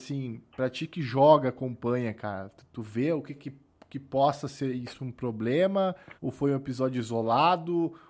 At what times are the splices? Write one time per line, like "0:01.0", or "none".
0:03.4
0:06.2